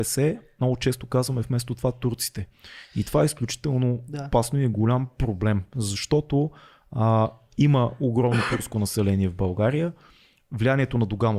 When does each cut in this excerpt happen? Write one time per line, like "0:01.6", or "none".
none